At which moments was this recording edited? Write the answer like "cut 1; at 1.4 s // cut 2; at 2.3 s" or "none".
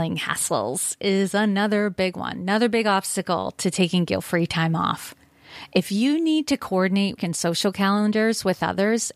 cut 1; at 7.2 s